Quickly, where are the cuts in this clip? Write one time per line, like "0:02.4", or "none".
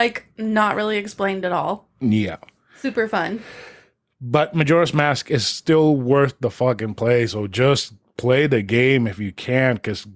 none